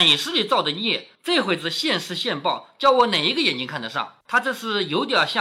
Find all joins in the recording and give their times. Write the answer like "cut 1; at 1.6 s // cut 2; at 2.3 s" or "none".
cut 1; at 1.2 s // cut 2; at 4.2 s